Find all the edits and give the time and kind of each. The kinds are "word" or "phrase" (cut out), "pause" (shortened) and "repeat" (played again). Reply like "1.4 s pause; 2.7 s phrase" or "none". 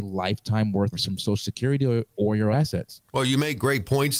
0.9 s phrase; 2.1 s word; 2.5 s word; 3.1 s pause

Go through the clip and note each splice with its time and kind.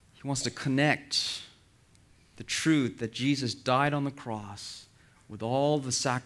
none

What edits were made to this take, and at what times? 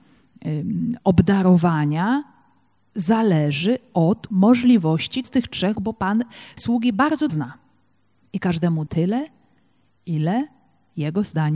4.3 s word; 5.2 s word; 5.8 s word; 6.6 s word; 7.3 s word; 8.9 s word

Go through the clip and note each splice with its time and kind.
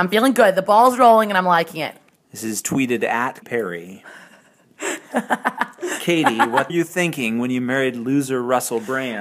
2.2 s pause; 3.4 s word; 6.7 s phrase

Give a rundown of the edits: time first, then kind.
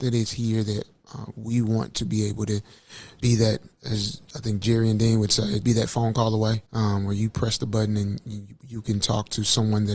5.6 s word; 6.7 s pause

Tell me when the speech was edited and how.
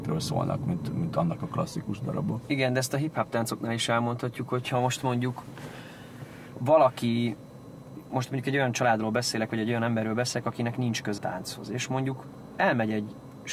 1.4 s phrase; 8.1 s word; 11.2 s word

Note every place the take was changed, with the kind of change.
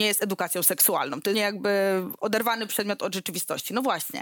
1.3 s word

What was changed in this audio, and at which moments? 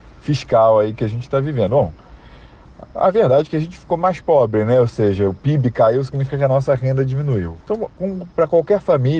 7.6 s pause

